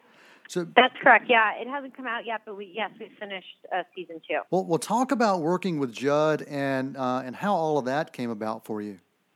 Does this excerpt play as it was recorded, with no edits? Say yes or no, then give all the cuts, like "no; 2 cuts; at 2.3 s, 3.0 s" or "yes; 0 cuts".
no; 1 cut; at 4.5 s